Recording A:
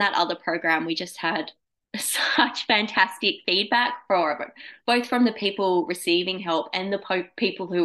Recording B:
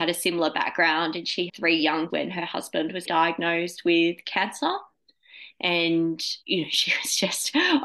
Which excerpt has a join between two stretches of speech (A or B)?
B